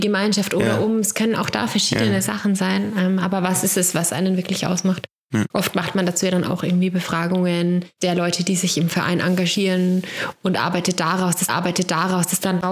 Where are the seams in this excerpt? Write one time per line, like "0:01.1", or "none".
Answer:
0:05.5
0:11.5